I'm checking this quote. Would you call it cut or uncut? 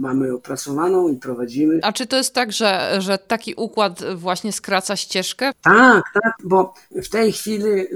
uncut